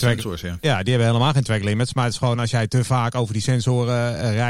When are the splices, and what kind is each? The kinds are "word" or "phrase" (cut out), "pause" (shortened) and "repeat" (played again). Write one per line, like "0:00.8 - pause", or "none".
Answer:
none